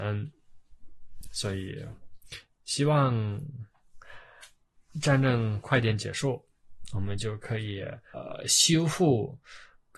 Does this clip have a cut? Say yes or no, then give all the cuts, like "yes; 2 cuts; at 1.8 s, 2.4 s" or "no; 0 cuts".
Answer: no; 0 cuts